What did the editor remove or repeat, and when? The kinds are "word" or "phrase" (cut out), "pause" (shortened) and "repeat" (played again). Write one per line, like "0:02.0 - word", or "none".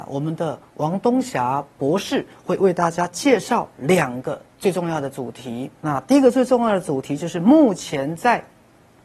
0:04.5 - pause
0:05.8 - pause